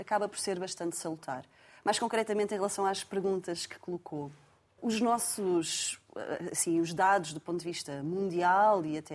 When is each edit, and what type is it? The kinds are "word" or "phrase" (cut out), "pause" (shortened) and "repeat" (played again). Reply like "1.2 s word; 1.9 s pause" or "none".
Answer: 4.8 s word